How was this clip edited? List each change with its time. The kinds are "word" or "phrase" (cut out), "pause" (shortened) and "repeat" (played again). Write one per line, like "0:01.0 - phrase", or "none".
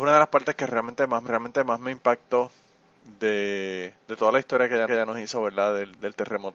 0:01.3 - repeat
0:04.0 - pause
0:04.9 - repeat